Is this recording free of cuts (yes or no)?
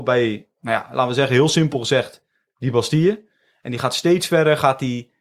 yes